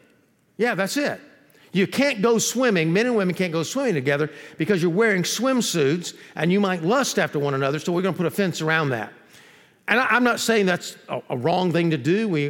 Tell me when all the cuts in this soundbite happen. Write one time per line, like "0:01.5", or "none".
none